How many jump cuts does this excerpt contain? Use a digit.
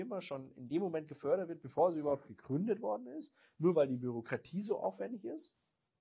0